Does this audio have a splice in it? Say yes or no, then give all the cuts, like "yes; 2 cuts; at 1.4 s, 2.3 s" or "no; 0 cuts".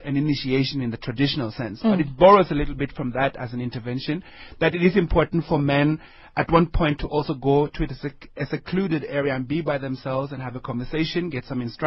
no; 0 cuts